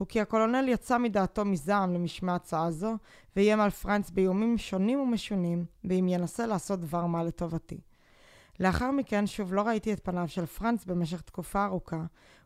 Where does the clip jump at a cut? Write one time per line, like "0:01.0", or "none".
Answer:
none

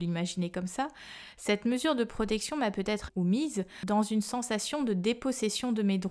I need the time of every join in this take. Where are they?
0:03.1

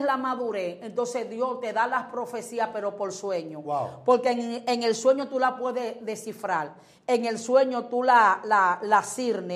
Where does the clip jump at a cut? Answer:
none

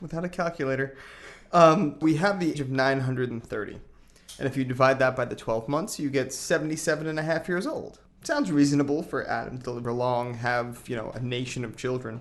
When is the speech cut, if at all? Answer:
0:02.0
0:02.5
0:08.1
0:09.8

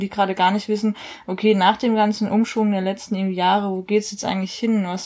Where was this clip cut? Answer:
none

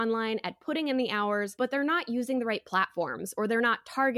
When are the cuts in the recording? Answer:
none

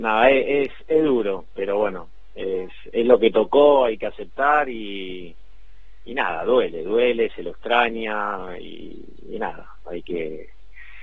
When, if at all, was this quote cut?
none

